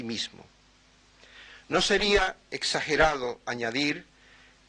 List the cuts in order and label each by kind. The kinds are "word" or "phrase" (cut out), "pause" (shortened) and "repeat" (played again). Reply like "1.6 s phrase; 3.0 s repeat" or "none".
none